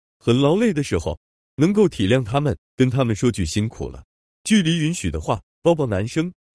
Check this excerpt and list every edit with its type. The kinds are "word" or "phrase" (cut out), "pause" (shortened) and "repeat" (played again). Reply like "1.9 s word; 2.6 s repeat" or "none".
none